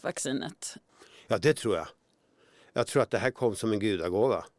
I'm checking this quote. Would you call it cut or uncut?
uncut